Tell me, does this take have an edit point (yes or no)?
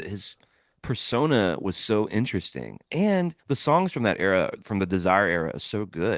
yes